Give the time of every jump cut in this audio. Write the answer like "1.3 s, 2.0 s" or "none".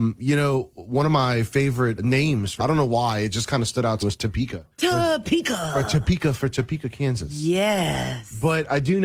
2.0 s, 2.6 s, 4.0 s, 4.7 s

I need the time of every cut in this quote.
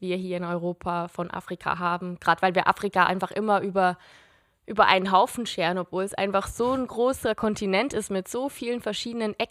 none

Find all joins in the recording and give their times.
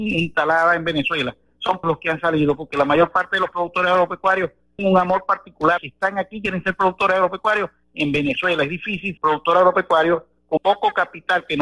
1.8 s, 4.8 s, 5.8 s, 9.2 s, 10.6 s

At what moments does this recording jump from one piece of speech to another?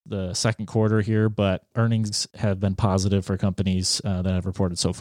1.7 s

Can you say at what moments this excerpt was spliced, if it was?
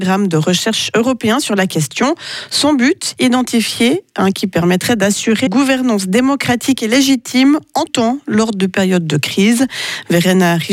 4.3 s, 5.5 s, 7.9 s

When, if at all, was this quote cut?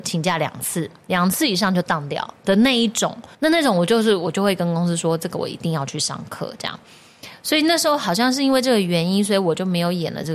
3.3 s

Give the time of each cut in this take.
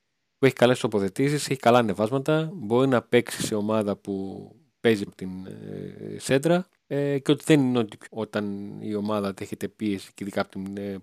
5.1 s, 6.8 s, 8.1 s

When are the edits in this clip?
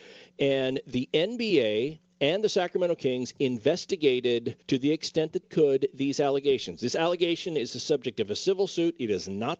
4.6 s, 5.4 s

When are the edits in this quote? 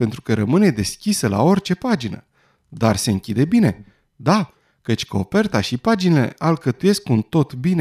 none

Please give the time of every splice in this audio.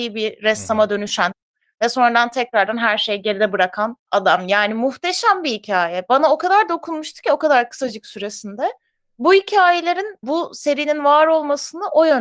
4.0 s, 10.2 s

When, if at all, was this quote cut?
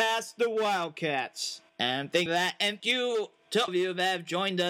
1.7 s, 2.3 s, 2.8 s, 3.7 s

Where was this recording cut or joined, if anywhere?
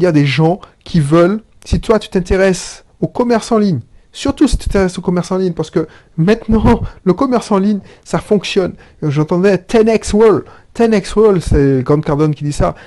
none

